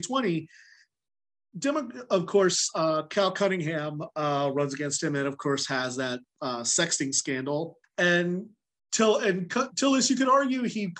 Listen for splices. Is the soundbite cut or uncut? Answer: cut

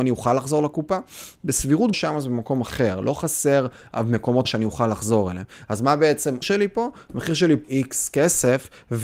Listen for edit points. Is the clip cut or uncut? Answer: cut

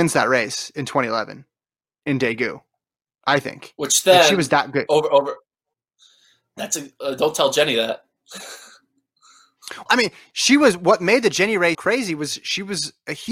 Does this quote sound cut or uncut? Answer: cut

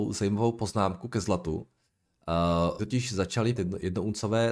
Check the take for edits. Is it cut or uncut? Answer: cut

